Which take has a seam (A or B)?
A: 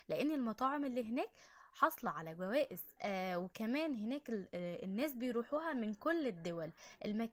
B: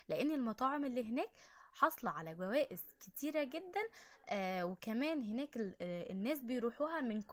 A